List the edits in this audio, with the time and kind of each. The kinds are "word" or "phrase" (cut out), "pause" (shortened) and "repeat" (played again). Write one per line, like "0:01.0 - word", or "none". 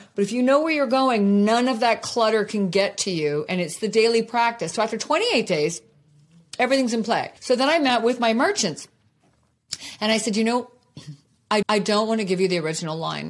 0:07.4 - pause
0:11.6 - repeat